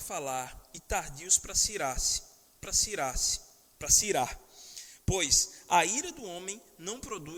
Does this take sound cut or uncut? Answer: cut